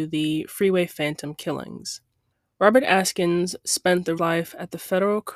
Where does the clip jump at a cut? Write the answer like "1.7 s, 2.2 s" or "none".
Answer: 2.3 s, 4.2 s

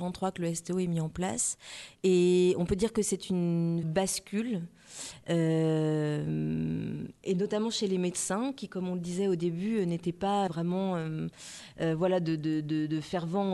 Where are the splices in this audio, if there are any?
3.8 s, 10.5 s

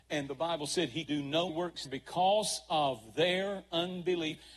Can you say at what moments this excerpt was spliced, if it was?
1.1 s, 1.5 s, 1.9 s

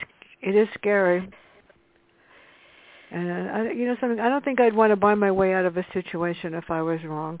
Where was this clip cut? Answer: none

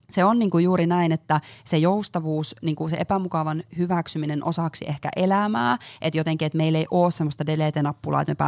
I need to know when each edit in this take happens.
none

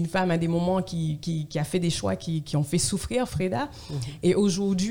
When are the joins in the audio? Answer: 1.5 s

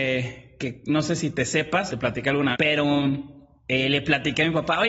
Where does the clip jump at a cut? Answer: 1.9 s, 2.5 s

